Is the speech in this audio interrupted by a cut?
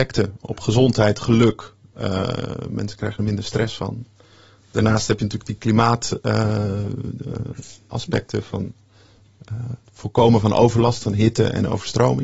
no; 0 cuts

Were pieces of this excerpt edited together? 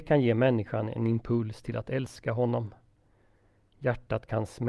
no; 0 cuts

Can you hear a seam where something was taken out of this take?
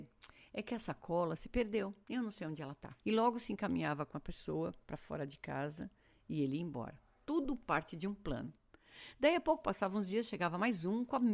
no; 0 cuts

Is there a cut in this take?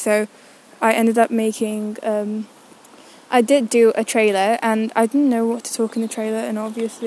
no; 0 cuts

